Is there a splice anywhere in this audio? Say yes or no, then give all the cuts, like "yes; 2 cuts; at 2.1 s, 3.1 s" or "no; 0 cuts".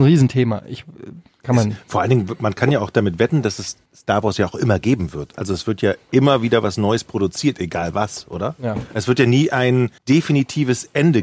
yes; 2 cuts; at 3.9 s, 10.0 s